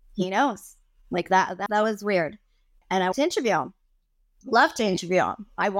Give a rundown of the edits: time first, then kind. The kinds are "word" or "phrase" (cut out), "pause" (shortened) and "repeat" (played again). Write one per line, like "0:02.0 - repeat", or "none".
0:01.7 - word
0:03.1 - word